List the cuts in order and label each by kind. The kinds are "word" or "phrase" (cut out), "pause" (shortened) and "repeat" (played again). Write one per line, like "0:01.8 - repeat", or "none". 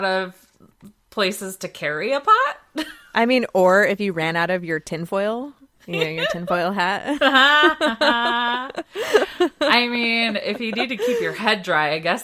none